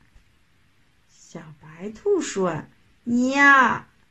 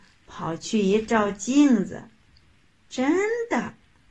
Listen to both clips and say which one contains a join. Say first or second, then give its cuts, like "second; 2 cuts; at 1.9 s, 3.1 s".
first; 1 cut; at 2.7 s